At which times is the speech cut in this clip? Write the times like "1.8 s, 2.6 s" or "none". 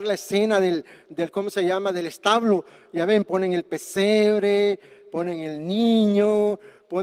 none